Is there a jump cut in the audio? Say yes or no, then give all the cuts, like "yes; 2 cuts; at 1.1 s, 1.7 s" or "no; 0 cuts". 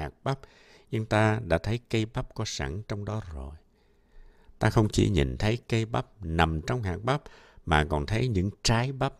no; 0 cuts